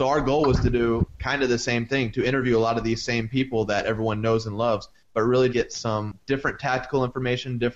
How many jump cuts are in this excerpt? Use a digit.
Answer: 1